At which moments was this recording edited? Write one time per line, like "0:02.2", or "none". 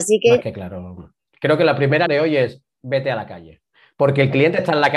0:02.1

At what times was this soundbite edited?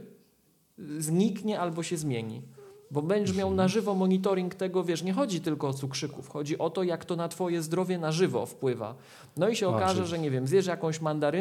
none

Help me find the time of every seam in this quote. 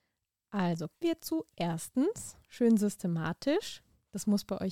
0:01.0

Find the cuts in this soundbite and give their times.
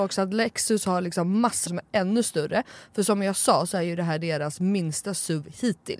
0:01.7

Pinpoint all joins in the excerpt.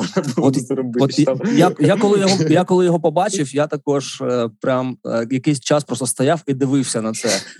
none

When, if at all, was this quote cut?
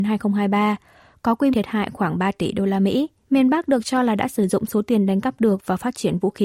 0:01.5
0:03.2

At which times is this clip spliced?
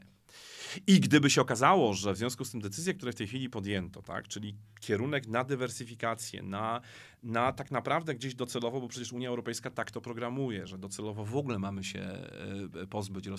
none

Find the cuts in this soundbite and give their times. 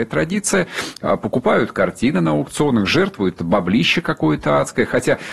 0:03.4

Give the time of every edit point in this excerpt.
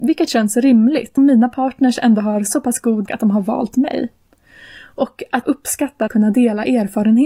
0:01.2
0:03.1
0:05.4
0:06.1

